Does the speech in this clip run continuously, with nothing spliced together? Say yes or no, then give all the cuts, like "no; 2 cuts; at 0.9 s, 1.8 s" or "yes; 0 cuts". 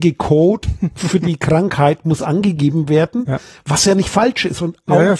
yes; 0 cuts